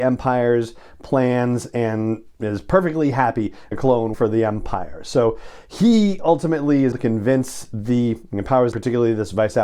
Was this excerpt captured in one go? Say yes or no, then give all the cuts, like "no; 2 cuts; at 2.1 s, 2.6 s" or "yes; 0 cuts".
no; 4 cuts; at 3.7 s, 4.1 s, 6.9 s, 8.7 s